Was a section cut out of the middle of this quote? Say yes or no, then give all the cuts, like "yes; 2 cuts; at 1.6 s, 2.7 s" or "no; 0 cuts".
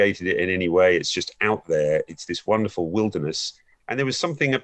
no; 0 cuts